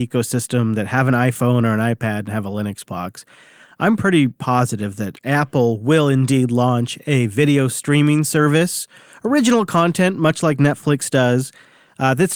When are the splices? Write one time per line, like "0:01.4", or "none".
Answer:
none